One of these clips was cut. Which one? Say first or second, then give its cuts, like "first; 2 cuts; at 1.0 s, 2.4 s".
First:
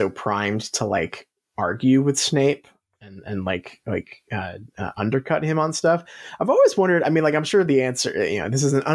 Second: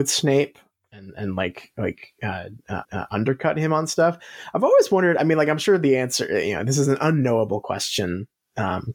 second; 1 cut; at 2.8 s